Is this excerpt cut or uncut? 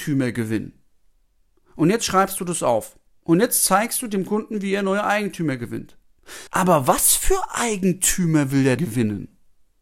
cut